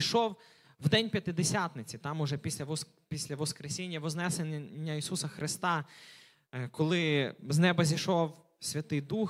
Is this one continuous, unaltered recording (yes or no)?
yes